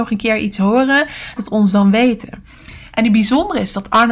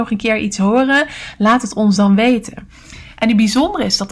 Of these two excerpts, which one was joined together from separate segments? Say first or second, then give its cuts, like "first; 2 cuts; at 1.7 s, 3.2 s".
first; 1 cut; at 1.4 s